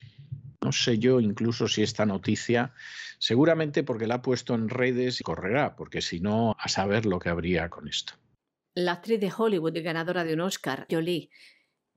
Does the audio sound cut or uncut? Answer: cut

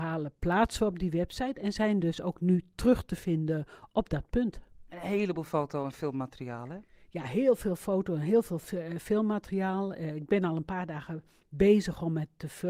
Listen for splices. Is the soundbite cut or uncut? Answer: uncut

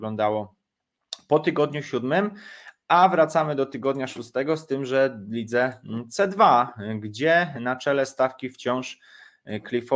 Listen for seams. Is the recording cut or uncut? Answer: uncut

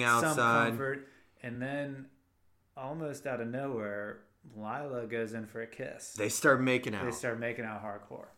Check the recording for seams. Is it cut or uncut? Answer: uncut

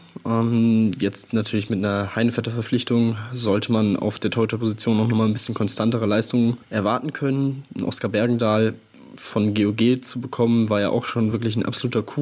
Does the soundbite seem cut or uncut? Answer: uncut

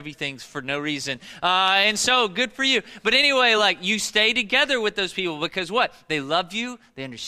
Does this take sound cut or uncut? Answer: uncut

